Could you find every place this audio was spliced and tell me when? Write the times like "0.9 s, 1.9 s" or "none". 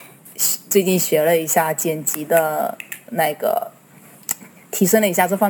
none